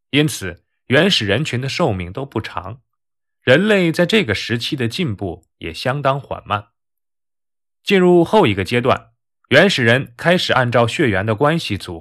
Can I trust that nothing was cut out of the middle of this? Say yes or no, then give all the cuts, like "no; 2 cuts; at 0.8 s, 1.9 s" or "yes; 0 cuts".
no; 1 cut; at 5.5 s